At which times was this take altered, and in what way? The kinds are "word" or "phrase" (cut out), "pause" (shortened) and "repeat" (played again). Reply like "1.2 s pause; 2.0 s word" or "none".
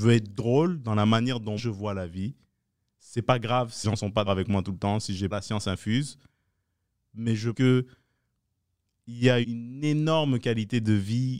1.6 s word; 3.8 s word; 4.3 s word; 5.3 s word; 7.5 s word; 9.4 s word